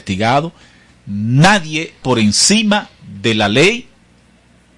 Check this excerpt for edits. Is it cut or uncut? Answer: cut